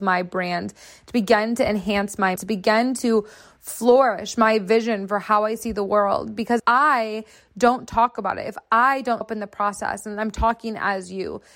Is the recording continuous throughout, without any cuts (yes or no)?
no